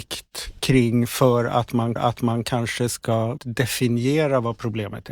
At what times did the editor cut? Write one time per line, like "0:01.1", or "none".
0:02.0
0:03.4